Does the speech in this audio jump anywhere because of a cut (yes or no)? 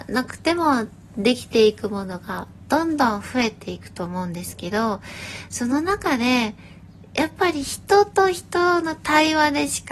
no